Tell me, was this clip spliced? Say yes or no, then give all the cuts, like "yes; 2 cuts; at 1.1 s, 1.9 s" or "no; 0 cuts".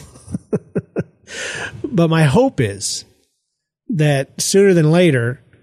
no; 0 cuts